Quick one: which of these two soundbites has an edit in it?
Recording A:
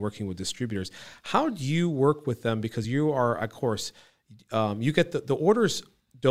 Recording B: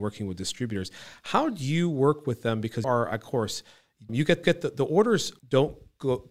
B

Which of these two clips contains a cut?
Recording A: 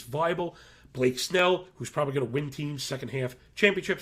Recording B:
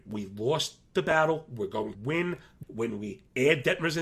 B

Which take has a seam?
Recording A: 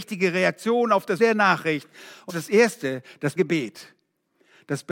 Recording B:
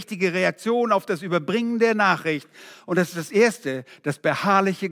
A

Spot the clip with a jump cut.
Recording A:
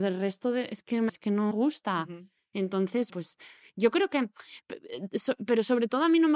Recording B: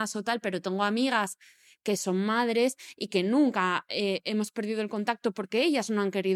A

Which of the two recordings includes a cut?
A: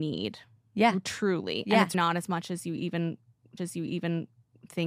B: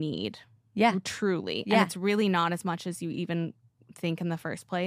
A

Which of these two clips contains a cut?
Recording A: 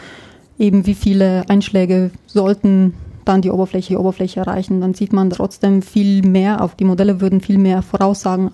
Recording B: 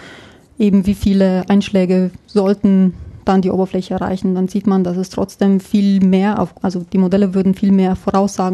A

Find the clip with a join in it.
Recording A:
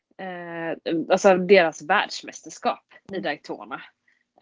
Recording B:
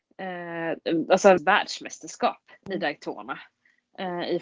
B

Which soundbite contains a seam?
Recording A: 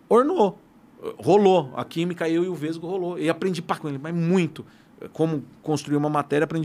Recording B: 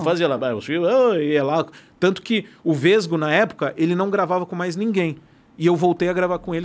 A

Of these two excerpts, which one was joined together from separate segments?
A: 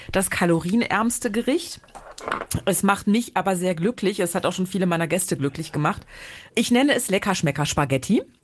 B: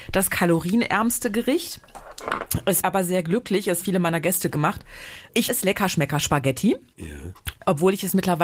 B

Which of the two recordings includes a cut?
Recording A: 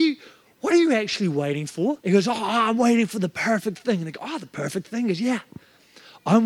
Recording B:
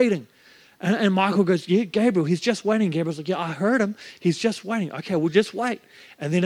A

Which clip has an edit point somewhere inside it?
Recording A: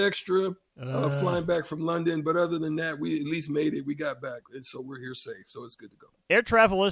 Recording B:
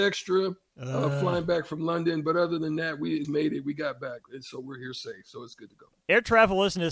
B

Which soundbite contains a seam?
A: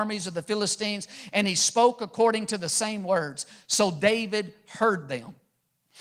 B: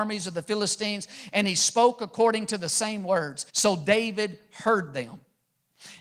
B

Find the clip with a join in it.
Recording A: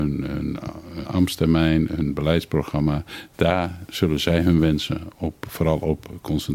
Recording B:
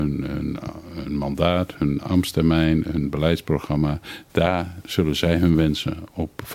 A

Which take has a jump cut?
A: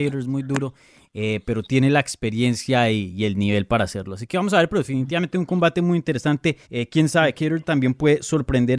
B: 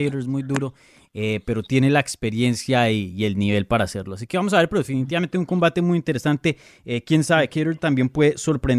A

